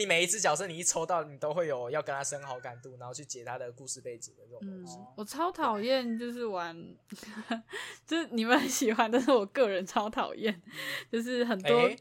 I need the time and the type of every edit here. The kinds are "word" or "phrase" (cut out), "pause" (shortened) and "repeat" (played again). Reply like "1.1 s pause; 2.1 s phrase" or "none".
none